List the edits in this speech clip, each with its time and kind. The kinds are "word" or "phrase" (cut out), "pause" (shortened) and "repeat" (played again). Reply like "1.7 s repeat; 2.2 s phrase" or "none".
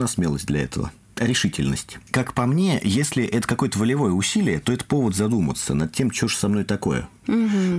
none